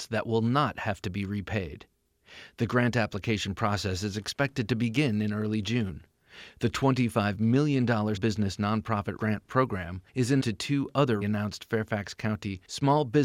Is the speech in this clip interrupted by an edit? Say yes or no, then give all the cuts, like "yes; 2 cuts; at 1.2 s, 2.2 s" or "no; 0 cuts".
yes; 5 cuts; at 8.2 s, 9.2 s, 10.1 s, 10.4 s, 11.2 s